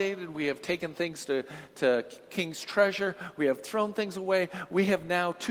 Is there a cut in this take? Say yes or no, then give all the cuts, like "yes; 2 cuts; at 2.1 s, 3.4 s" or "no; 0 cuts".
no; 0 cuts